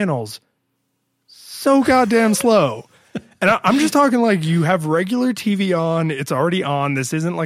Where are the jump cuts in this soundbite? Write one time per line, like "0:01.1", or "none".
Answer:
none

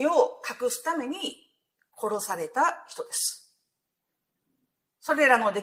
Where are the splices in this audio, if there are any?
none

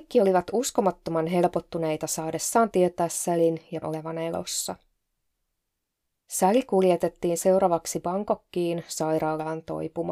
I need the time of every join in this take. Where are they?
0:03.8

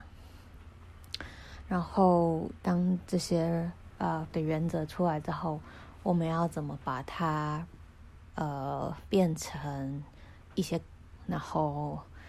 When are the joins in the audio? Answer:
0:04.3
0:11.2

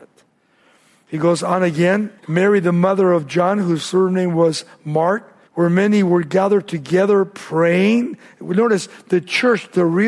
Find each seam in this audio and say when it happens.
0:02.2
0:05.5

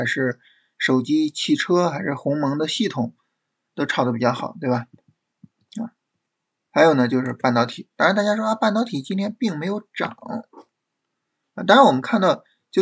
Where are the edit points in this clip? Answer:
none

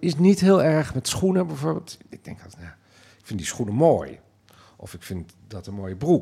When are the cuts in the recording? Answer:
none

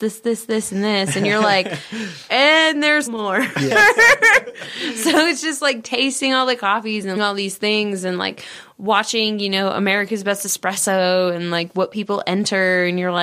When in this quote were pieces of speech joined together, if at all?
0:03.1
0:07.2

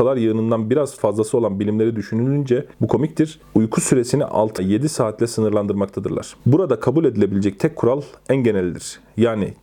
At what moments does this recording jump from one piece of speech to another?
0:02.7
0:04.6
0:06.4

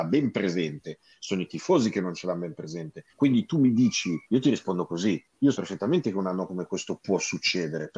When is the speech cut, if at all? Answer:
0:03.1
0:04.2
0:05.5

